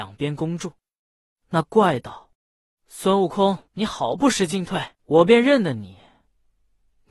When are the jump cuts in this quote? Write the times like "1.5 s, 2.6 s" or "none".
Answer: 2.3 s, 3.7 s, 4.9 s